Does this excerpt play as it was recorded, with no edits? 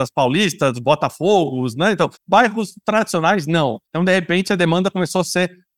no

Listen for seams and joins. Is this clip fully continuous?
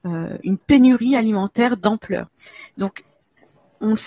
yes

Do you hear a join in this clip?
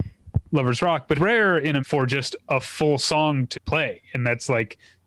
yes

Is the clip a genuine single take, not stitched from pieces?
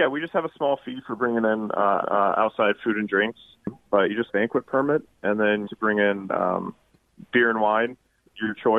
no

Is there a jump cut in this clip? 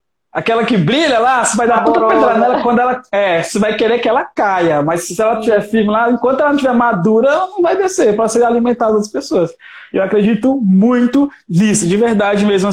no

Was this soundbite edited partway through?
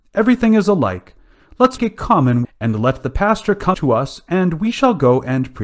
yes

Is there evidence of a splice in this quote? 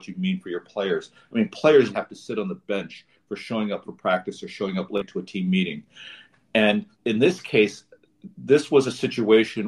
yes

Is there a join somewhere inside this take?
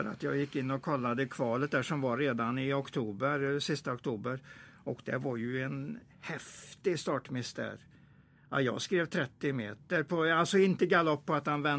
no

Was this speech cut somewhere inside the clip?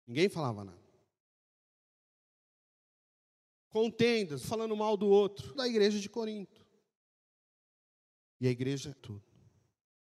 yes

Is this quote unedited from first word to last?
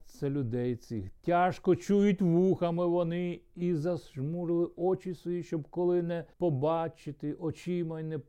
no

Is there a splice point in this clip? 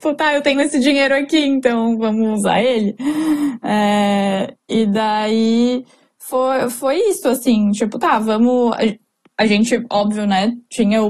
no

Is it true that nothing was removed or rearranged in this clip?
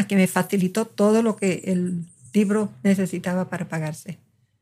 yes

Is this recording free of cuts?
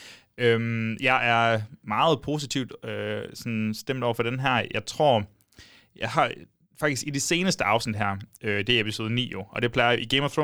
yes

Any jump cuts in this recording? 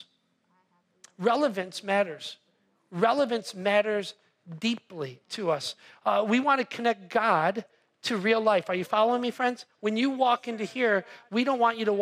no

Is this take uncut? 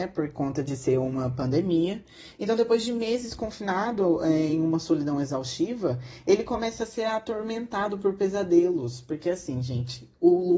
yes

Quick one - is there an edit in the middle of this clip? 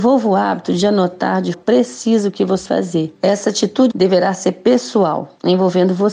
yes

